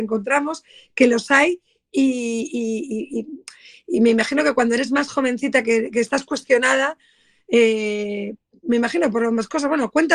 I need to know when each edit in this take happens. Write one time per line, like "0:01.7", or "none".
none